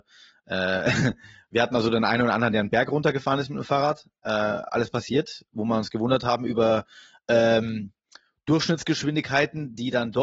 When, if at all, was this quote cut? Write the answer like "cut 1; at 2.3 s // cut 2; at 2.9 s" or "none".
none

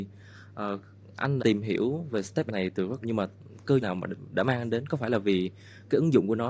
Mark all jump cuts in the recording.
cut 1; at 1.4 s // cut 2; at 2.5 s // cut 3; at 3.0 s // cut 4; at 3.8 s

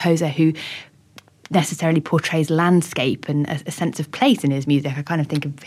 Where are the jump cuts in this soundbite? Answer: none

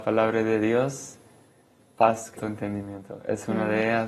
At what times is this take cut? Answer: cut 1; at 1.8 s // cut 2; at 2.4 s

